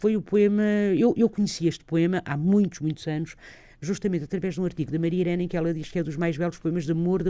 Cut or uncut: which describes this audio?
uncut